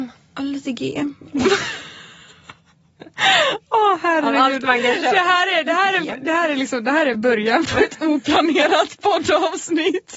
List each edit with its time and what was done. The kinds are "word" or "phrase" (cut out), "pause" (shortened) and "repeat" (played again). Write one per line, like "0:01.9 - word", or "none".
none